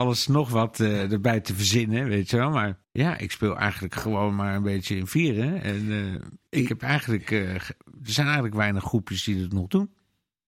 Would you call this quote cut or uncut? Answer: cut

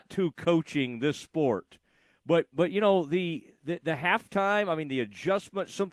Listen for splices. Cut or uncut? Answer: uncut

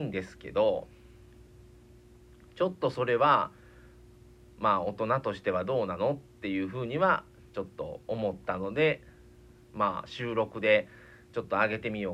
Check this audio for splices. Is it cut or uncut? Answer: uncut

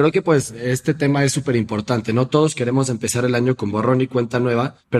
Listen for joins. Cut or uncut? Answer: uncut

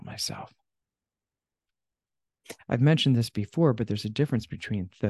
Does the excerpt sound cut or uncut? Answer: uncut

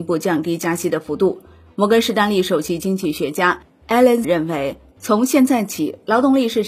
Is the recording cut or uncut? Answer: cut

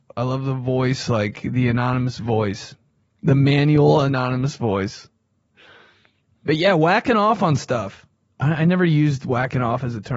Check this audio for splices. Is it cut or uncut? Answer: uncut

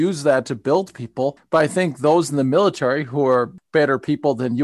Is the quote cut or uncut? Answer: uncut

